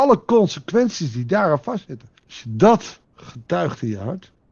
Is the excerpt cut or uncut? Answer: cut